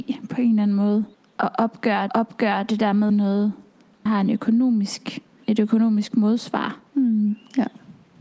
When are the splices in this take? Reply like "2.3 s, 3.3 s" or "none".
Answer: 1.1 s, 2.1 s, 3.1 s, 4.1 s, 6.9 s